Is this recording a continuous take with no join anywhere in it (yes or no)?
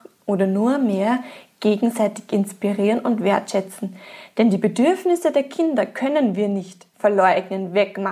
yes